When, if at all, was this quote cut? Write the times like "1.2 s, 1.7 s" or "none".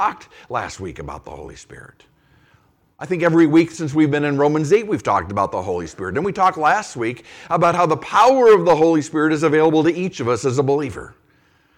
none